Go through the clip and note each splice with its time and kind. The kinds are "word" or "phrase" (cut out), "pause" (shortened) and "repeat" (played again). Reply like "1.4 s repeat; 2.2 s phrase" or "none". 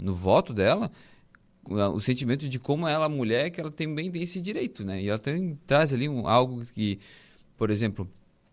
none